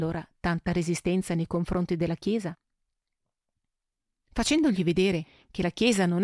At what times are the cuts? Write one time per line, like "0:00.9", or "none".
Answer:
none